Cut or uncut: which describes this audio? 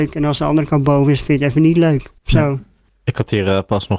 cut